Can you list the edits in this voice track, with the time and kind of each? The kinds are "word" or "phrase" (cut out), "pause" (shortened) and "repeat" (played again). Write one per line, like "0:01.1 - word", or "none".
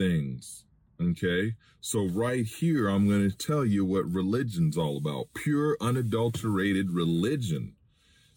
none